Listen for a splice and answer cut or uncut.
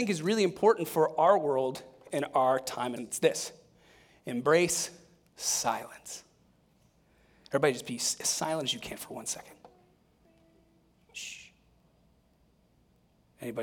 cut